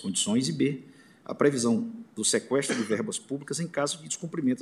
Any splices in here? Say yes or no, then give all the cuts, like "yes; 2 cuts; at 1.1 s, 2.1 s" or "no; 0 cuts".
no; 0 cuts